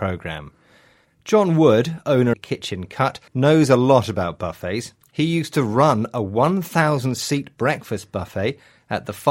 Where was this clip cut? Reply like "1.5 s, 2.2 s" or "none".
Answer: 2.3 s, 3.3 s